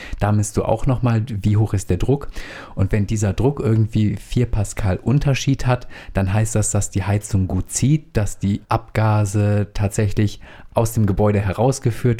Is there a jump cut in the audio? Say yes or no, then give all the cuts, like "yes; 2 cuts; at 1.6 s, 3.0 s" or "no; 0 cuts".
yes; 1 cut; at 8.6 s